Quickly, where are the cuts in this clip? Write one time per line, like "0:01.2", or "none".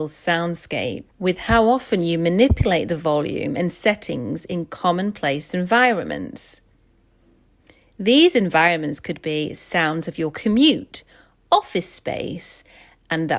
0:01.1